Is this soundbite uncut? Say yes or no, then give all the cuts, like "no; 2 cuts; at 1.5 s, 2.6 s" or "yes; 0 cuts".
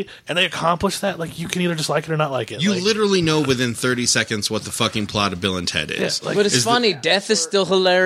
yes; 0 cuts